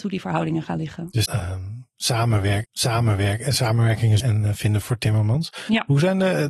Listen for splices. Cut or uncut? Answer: cut